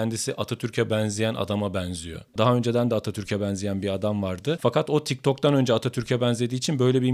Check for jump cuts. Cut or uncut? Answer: cut